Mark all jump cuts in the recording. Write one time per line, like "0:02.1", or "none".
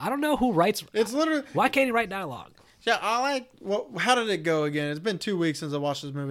none